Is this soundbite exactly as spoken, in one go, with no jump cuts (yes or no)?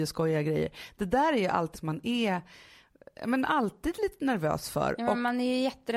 no